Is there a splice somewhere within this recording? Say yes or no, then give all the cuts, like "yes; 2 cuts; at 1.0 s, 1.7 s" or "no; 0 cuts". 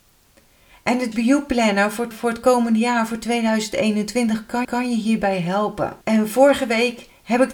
yes; 4 cuts; at 1.1 s, 2.1 s, 4.6 s, 6.0 s